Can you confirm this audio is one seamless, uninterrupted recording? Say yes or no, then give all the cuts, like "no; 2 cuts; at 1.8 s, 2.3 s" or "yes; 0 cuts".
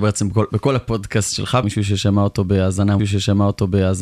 no; 2 cuts; at 1.6 s, 3.0 s